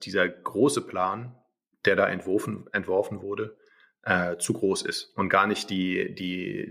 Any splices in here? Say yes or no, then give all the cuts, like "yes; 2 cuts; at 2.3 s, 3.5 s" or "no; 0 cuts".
no; 0 cuts